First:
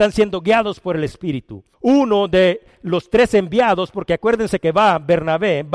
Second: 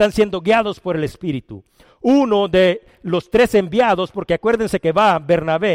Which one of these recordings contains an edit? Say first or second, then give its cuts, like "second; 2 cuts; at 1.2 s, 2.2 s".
first; 1 cut; at 1.7 s